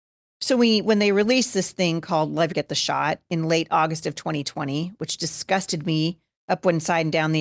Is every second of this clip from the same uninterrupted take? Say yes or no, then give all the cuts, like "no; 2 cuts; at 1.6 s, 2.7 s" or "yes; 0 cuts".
no; 2 cuts; at 2.5 s, 6.4 s